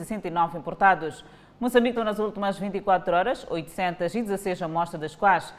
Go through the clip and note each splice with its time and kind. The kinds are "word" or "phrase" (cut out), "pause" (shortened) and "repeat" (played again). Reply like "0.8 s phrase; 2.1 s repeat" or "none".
2.0 s word